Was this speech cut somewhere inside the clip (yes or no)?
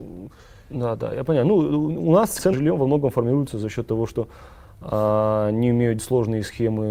yes